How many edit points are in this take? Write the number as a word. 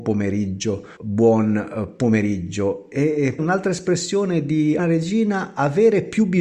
three